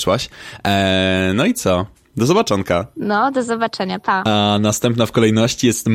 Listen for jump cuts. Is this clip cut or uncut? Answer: uncut